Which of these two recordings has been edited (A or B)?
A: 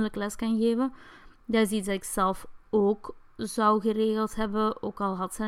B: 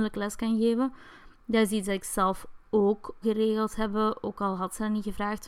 B